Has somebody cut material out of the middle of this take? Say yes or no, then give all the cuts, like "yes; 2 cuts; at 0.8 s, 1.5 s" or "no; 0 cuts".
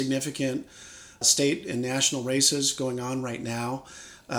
yes; 1 cut; at 1.2 s